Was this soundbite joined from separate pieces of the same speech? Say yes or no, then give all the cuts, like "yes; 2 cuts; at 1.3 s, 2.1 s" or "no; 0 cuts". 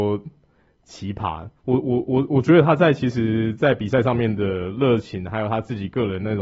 yes; 1 cut; at 1.6 s